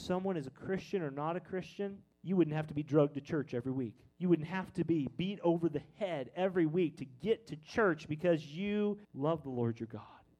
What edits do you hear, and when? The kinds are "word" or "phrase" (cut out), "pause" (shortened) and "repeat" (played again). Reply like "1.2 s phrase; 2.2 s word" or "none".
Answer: 2.1 s pause; 4.1 s pause; 9.0 s pause

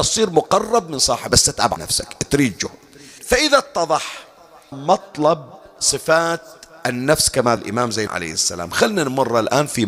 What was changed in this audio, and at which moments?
1.3 s word; 1.8 s word; 3.2 s word; 4.7 s word; 7.6 s word; 8.1 s word

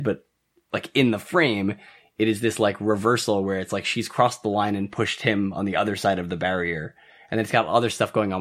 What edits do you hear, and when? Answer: none

